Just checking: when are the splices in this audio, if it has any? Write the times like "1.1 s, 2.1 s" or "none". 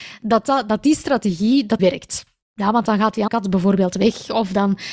1.8 s, 3.3 s